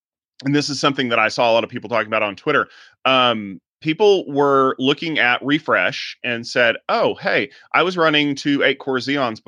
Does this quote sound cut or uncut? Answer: uncut